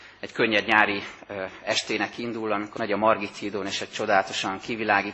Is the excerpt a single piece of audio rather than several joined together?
no; 1 cut; at 2.8 s

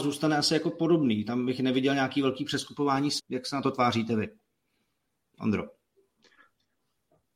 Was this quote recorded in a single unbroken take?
no; 1 cut; at 3.2 s

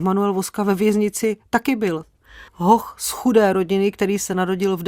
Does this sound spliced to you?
yes; 1 cut; at 2.5 s

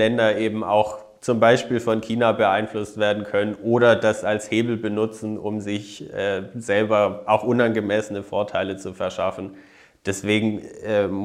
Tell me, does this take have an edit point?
no; 0 cuts

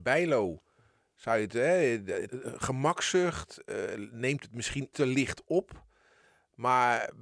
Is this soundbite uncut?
no; 2 cuts; at 2.3 s, 4.9 s

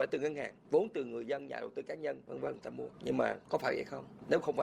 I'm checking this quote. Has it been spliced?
yes; 1 cut; at 2.9 s

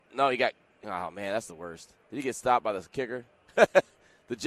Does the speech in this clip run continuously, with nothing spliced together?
no; 1 cut; at 2.0 s

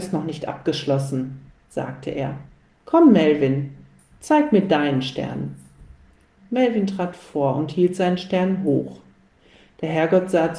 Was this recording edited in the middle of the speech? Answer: no; 0 cuts

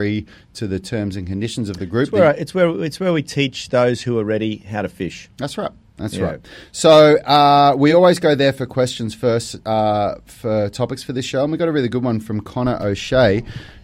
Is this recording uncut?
yes; 0 cuts

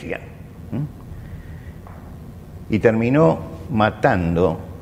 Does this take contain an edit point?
no; 0 cuts

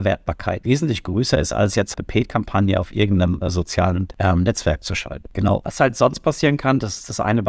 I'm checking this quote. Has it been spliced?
yes; 1 cut; at 1.9 s

